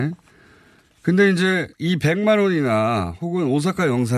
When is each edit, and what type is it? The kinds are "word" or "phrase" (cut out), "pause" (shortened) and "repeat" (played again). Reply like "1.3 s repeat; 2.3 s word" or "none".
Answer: 1.7 s pause